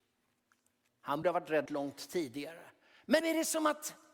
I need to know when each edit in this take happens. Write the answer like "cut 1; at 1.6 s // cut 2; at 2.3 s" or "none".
cut 1; at 1.2 s // cut 2; at 1.7 s // cut 3; at 3.2 s